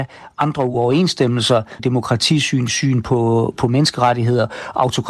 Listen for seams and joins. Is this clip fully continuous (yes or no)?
no